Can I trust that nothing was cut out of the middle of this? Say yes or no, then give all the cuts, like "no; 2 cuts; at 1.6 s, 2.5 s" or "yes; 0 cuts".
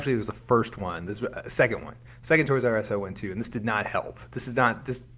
yes; 0 cuts